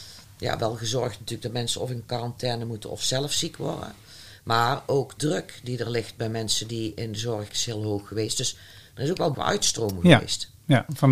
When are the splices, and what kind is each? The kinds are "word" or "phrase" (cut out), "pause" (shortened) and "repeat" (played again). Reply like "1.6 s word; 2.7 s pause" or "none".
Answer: 5.2 s word; 7.5 s word; 9.3 s word